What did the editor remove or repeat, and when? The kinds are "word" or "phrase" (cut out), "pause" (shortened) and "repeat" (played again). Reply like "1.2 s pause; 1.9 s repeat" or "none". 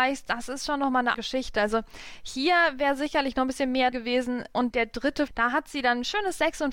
1.1 s word; 3.9 s word; 4.7 s word; 5.3 s word